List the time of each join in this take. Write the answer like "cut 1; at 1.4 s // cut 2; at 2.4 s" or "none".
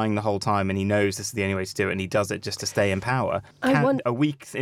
cut 1; at 3.5 s